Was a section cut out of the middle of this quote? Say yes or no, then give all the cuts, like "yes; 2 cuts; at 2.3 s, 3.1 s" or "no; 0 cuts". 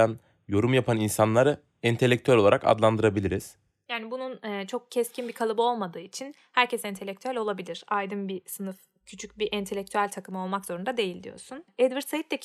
no; 0 cuts